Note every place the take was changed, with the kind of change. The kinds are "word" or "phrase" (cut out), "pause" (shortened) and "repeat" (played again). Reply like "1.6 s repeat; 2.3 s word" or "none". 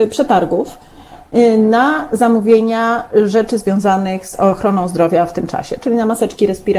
none